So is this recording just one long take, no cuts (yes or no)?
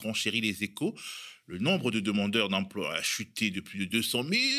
yes